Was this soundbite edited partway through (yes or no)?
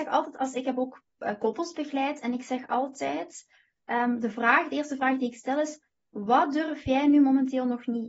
no